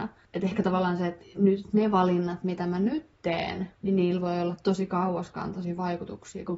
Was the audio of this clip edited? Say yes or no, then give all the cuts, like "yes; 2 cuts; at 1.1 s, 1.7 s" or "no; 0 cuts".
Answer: yes; 1 cut; at 3.8 s